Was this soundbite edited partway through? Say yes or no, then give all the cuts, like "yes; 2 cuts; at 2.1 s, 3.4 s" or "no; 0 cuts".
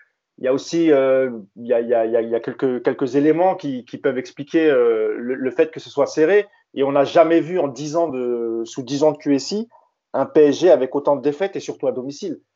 no; 0 cuts